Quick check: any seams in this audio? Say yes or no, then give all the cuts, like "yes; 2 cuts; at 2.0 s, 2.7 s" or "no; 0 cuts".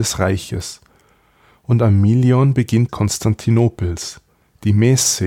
yes; 1 cut; at 2.9 s